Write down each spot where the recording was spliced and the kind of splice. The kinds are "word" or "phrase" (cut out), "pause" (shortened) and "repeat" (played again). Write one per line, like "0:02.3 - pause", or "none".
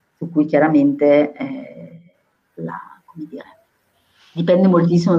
none